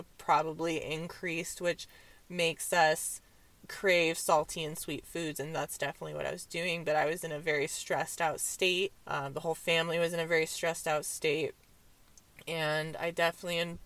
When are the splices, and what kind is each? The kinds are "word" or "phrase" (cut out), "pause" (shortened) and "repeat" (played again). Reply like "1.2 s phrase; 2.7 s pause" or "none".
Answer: 9.0 s pause